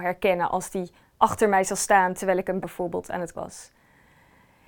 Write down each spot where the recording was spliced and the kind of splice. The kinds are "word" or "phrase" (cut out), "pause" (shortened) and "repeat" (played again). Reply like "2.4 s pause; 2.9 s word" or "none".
2.6 s word; 3.3 s word